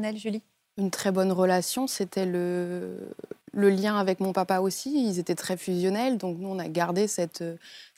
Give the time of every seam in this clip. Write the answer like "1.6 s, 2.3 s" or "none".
3.4 s